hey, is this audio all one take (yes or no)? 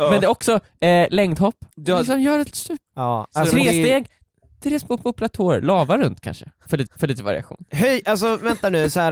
no